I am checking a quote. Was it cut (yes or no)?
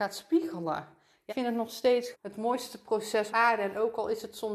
yes